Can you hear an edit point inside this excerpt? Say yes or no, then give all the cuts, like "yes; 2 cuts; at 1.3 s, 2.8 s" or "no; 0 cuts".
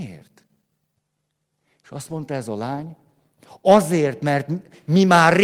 no; 0 cuts